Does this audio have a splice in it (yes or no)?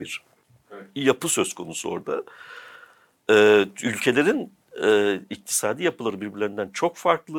no